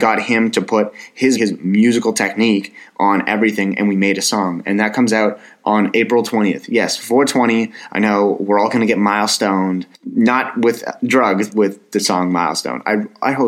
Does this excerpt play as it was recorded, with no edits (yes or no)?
no